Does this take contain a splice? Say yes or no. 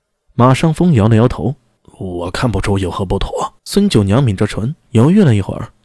yes